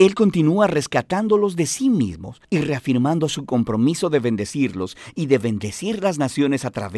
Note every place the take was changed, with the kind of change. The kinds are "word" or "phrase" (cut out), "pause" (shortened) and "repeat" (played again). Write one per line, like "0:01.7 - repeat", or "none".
0:02.4 - pause